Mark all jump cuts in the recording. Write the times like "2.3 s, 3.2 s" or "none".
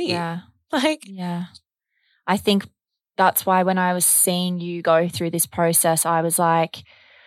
none